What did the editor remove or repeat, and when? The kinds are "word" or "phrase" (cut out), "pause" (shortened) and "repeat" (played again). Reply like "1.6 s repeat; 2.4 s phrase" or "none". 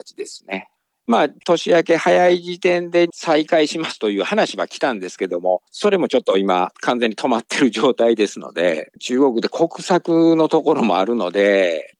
5.7 s pause